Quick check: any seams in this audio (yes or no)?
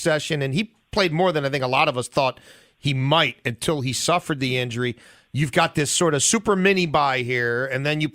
no